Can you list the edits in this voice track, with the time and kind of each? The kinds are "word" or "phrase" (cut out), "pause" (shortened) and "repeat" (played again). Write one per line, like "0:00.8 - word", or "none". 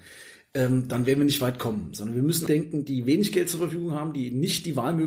0:02.5 - phrase